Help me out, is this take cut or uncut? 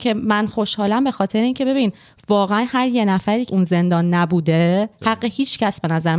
cut